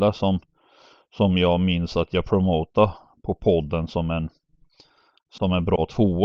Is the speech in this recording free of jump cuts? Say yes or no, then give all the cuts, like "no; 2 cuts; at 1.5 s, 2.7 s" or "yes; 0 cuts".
yes; 0 cuts